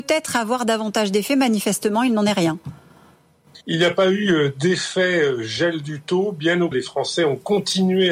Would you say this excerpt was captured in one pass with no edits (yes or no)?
no